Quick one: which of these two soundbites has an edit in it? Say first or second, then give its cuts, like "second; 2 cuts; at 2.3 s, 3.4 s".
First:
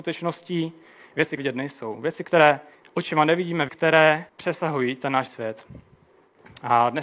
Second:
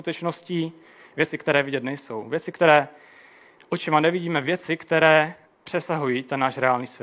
first; 5 cuts; at 1.4 s, 2.7 s, 3.7 s, 4.3 s, 5.3 s